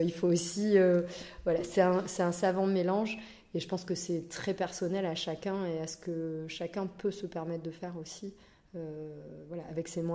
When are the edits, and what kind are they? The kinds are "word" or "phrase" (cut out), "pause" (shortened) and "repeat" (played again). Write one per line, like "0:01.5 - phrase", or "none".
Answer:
none